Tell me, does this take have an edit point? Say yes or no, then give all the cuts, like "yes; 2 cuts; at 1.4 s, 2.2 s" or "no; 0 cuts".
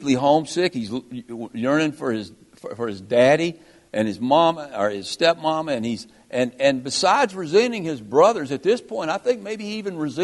no; 0 cuts